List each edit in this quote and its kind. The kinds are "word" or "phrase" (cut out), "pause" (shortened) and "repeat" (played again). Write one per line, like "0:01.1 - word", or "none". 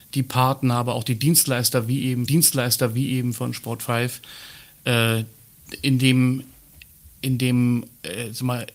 0:02.3 - repeat